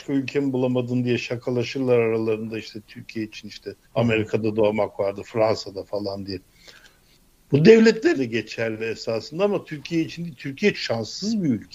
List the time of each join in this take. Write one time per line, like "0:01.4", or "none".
0:03.8
0:08.2
0:10.7